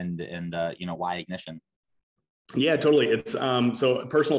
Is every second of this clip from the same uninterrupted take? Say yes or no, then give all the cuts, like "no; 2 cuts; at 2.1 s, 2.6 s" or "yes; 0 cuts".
yes; 0 cuts